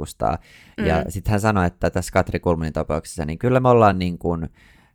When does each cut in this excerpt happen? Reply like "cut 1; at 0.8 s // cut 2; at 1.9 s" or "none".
none